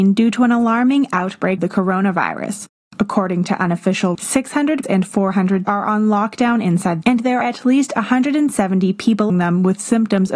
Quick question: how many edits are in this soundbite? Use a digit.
7